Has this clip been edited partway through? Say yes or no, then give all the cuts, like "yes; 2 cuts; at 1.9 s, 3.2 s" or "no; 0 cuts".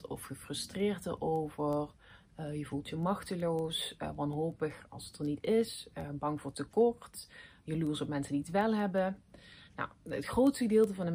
no; 0 cuts